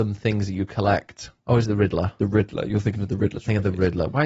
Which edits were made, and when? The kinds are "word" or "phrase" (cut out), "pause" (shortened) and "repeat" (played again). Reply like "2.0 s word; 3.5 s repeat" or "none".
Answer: 1.4 s pause